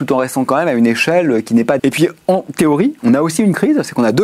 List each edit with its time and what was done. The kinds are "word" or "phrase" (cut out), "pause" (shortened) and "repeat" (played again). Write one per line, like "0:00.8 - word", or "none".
0:01.8 - word
0:03.0 - pause